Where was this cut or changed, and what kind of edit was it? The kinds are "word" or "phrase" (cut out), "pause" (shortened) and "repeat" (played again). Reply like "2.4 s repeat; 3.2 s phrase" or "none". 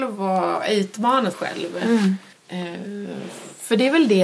1.3 s word; 2.3 s pause